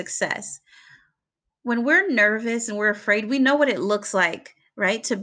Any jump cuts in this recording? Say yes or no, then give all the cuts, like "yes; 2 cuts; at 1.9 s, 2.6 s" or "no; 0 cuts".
no; 0 cuts